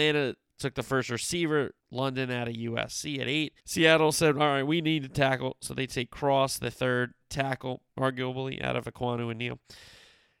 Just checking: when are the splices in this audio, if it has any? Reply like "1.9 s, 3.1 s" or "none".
1.8 s, 3.6 s, 7.9 s